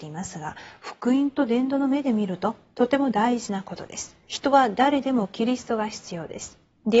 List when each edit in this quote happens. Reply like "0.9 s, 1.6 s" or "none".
4.2 s